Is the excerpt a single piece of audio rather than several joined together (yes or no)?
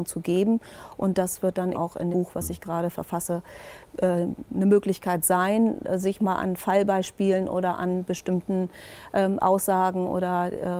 no